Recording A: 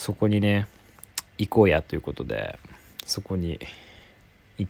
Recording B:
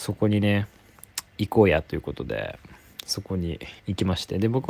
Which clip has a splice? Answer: B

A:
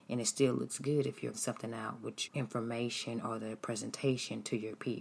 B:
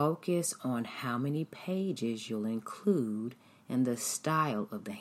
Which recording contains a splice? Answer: A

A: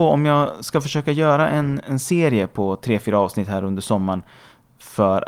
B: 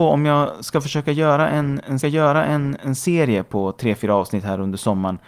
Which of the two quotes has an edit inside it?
B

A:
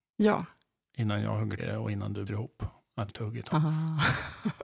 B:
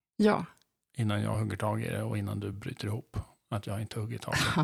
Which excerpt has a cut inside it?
A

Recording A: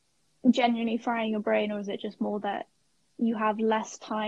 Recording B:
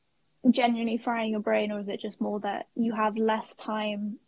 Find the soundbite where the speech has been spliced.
B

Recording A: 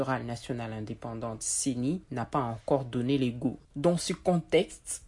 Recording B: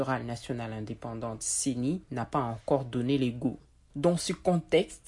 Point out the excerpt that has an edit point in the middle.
A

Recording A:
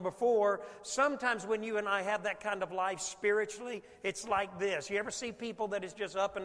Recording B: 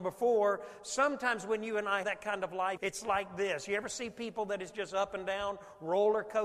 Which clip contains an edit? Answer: B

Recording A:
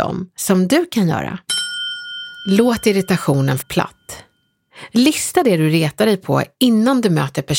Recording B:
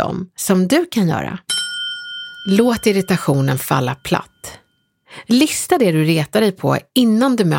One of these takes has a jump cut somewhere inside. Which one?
A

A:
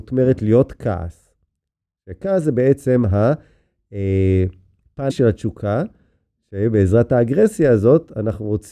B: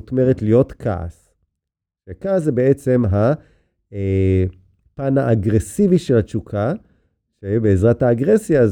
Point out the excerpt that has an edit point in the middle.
A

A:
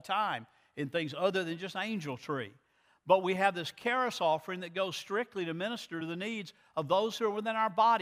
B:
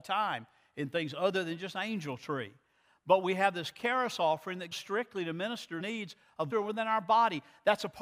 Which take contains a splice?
B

